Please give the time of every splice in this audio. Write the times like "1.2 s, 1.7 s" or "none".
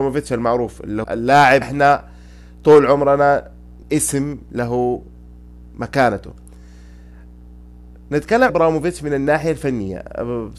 1.0 s, 1.6 s, 3.8 s, 8.5 s